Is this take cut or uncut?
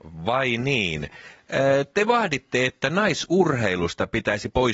uncut